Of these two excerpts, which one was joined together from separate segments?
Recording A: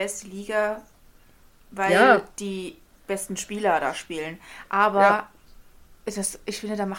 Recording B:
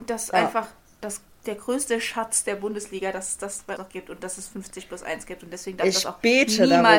B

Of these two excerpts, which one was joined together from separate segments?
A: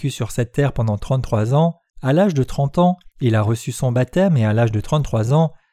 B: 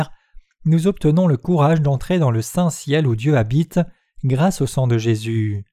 A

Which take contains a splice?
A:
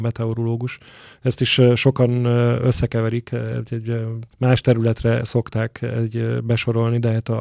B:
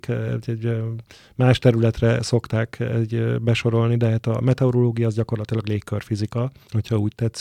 A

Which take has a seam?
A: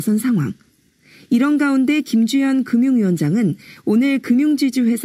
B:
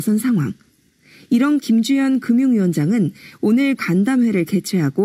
B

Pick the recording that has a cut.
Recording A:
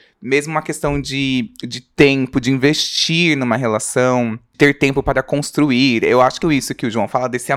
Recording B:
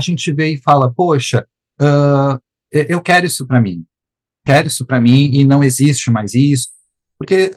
A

